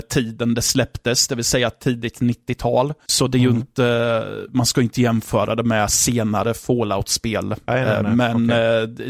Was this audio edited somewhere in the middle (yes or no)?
no